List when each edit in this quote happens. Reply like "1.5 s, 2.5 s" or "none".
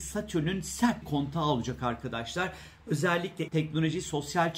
1.0 s, 3.5 s